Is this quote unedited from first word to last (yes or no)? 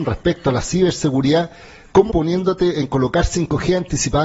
no